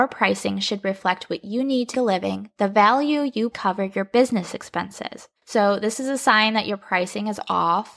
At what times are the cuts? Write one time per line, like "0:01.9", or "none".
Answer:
0:01.9
0:03.5
0:05.4